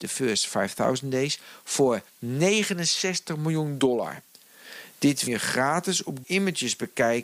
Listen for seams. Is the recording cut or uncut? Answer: cut